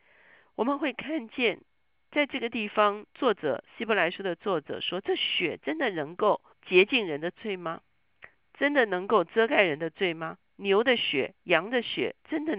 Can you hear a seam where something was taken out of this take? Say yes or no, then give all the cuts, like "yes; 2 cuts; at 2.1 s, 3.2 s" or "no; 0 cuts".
yes; 1 cut; at 6.5 s